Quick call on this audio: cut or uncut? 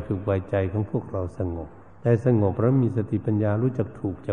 cut